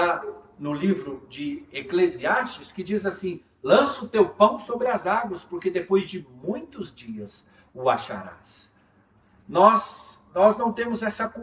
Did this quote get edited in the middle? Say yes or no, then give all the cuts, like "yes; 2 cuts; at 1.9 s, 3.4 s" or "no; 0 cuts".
no; 0 cuts